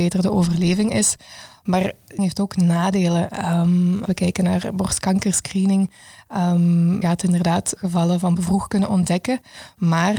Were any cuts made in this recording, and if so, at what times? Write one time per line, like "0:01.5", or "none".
0:02.2
0:04.1
0:07.0
0:07.8
0:08.4